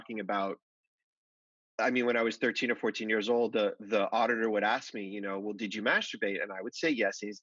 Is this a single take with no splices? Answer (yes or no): yes